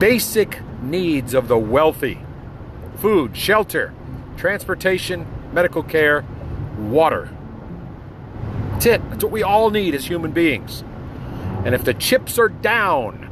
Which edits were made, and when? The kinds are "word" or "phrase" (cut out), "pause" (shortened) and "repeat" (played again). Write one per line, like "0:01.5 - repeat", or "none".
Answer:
none